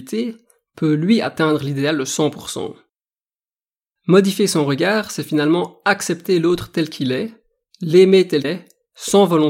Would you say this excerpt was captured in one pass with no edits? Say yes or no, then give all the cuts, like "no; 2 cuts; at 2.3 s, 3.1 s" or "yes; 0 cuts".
no; 1 cut; at 8.4 s